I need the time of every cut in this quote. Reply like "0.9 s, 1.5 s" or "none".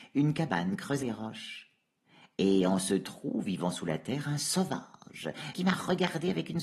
1.0 s, 5.5 s